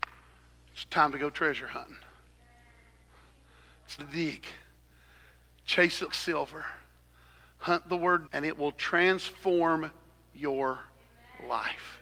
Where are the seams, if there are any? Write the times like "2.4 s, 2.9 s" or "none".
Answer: 4.0 s, 6.1 s, 8.3 s